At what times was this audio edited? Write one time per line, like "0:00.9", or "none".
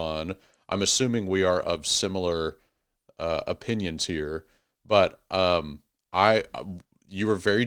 none